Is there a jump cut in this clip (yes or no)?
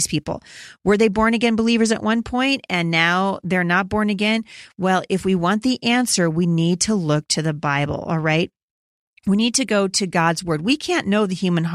no